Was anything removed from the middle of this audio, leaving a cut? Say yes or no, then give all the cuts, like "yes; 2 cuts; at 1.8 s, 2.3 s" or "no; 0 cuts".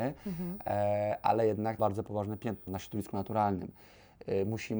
yes; 2 cuts; at 1.8 s, 2.7 s